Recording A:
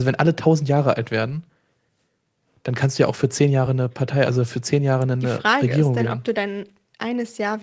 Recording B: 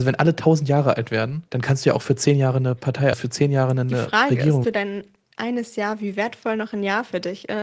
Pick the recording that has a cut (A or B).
B